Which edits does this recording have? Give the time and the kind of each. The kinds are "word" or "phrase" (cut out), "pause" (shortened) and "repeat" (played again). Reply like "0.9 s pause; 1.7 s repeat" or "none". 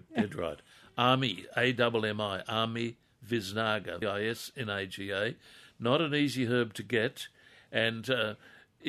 4.0 s word